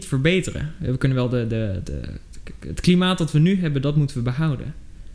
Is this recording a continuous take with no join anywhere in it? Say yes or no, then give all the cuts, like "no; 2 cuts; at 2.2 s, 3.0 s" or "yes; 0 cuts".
yes; 0 cuts